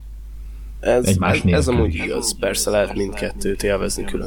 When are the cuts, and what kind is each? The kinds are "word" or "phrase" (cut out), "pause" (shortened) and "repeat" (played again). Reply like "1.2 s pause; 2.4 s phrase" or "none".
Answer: none